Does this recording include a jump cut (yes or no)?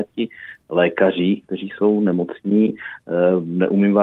no